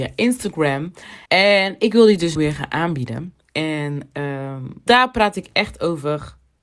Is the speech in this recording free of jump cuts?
no; 4 cuts; at 1.3 s, 2.4 s, 3.4 s, 4.9 s

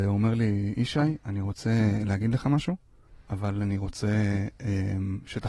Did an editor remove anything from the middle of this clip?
no; 0 cuts

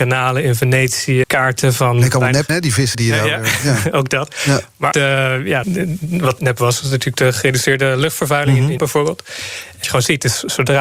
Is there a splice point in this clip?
yes; 8 cuts; at 1.2 s, 2.5 s, 2.9 s, 4.9 s, 5.6 s, 6.4 s, 8.8 s, 9.8 s

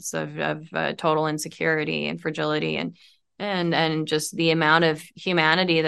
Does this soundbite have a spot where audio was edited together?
no; 0 cuts

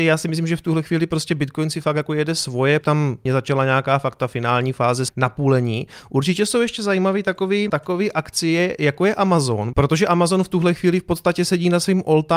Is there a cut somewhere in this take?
yes; 4 cuts; at 2.8 s, 3.3 s, 5.1 s, 7.7 s

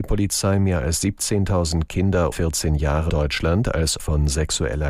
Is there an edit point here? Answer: yes; 3 cuts; at 2.3 s, 3.1 s, 4.0 s

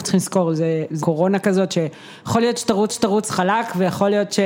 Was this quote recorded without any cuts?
no; 2 cuts; at 1.0 s, 2.9 s

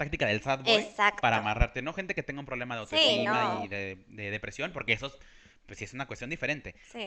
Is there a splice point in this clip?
no; 0 cuts

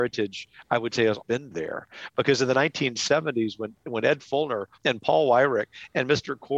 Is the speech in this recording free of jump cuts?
no; 2 cuts; at 1.2 s, 4.7 s

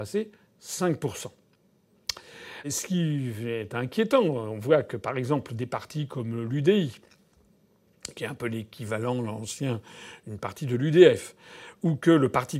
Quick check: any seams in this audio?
yes; 1 cut; at 2.6 s

